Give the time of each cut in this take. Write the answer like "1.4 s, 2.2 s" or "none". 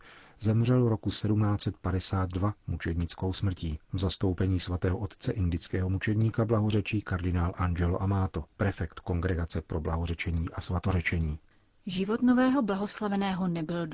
3.8 s